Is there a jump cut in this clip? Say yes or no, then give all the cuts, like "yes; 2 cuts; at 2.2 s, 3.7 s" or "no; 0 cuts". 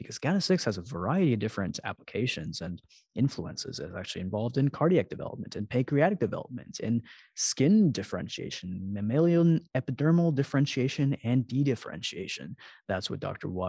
no; 0 cuts